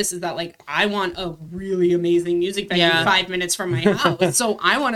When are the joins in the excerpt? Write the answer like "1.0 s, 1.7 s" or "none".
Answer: none